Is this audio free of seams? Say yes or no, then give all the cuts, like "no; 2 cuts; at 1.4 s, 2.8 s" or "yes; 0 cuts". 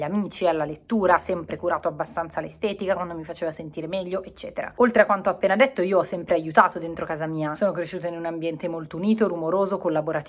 yes; 0 cuts